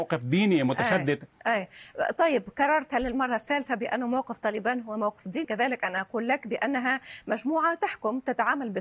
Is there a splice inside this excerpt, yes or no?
yes